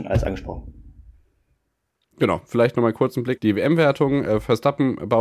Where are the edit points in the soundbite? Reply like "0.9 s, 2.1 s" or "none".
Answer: 3.4 s